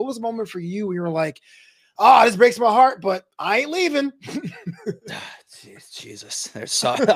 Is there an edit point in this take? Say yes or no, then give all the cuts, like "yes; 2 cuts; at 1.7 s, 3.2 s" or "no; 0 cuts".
no; 0 cuts